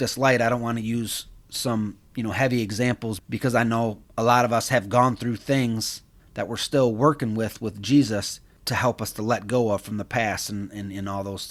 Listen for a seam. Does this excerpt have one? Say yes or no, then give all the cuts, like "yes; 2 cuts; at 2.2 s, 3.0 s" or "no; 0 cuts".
yes; 1 cut; at 3.2 s